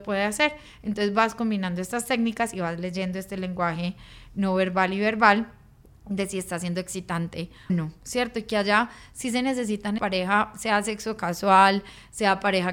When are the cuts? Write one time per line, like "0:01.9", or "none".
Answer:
0:07.7
0:10.0